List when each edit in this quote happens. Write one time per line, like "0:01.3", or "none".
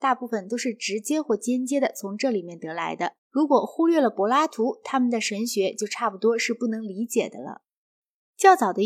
0:03.2